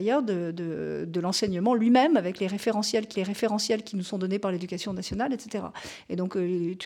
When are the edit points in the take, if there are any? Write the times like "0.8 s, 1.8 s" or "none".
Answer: 3.1 s